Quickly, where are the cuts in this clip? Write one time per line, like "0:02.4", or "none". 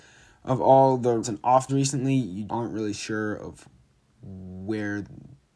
0:01.2
0:01.7
0:02.5